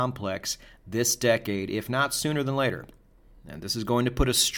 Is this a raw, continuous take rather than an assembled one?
yes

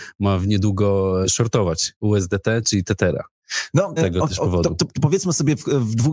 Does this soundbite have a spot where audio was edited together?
yes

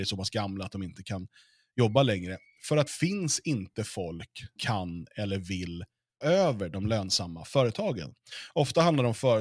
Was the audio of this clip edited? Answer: yes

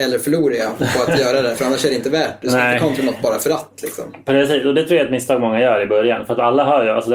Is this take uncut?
yes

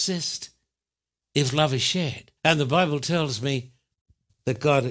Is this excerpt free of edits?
no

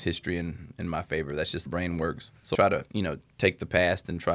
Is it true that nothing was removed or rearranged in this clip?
no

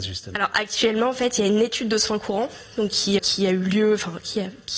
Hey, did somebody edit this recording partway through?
yes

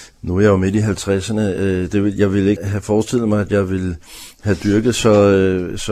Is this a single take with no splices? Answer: no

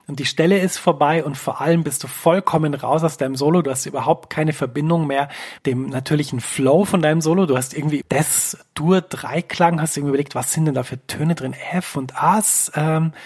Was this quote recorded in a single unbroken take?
no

